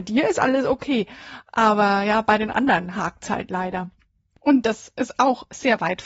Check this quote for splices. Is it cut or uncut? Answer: uncut